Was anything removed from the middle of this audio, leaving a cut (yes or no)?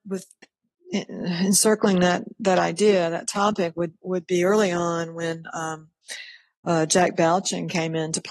no